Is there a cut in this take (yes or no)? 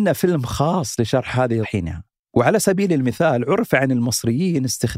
yes